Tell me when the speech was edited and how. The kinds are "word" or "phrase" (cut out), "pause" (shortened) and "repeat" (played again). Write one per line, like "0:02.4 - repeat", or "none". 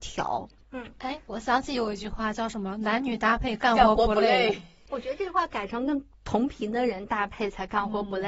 none